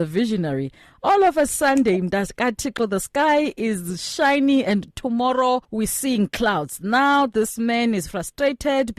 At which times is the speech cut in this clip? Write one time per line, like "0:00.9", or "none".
0:05.6